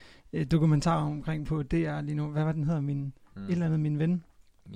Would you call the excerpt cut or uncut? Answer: uncut